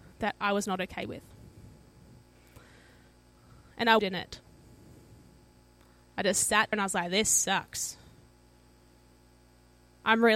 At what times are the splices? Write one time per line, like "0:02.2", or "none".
0:04.0
0:06.7